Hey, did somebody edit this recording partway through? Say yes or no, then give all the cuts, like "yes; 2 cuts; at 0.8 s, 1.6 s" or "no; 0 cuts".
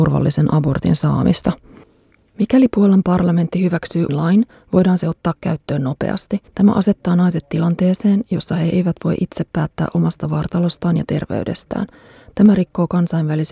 yes; 2 cuts; at 4.1 s, 6.5 s